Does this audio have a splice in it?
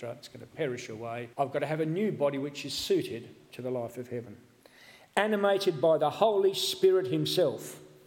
yes; 1 cut; at 1.3 s

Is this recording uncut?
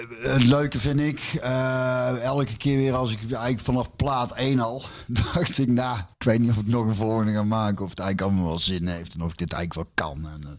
no; 1 cut; at 6.1 s

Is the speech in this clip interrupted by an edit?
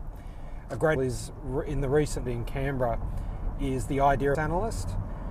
yes; 3 cuts; at 1.0 s, 2.3 s, 4.3 s

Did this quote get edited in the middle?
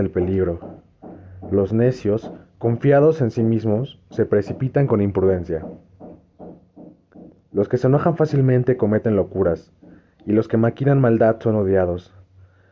no; 0 cuts

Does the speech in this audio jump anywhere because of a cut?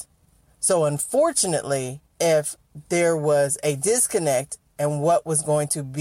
yes; 1 cut; at 2.1 s

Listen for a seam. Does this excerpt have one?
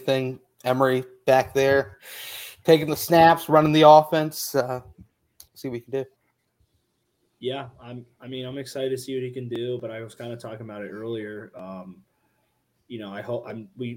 yes; 1 cut; at 5.5 s

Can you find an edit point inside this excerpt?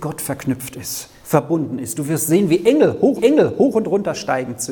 yes; 1 cut; at 3.2 s

